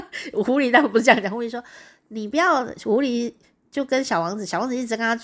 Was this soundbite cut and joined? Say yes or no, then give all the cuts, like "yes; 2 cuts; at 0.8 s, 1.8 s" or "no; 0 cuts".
no; 0 cuts